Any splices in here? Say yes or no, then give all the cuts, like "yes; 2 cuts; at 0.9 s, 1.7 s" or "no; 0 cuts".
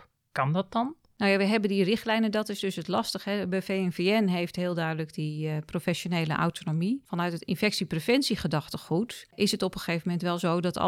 no; 0 cuts